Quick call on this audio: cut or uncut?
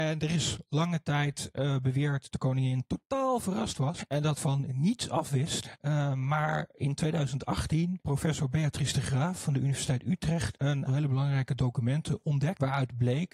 cut